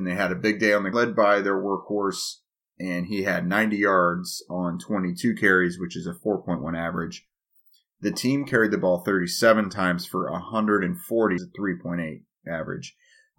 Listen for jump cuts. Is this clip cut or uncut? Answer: cut